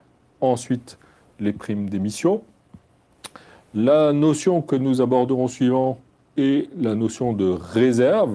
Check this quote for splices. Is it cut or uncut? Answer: uncut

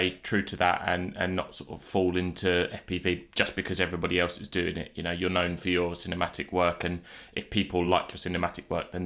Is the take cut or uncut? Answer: uncut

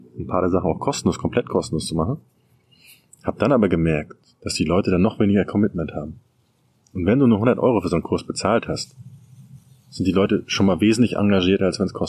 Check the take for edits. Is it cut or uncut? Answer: uncut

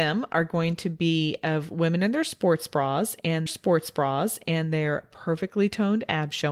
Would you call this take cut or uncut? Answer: cut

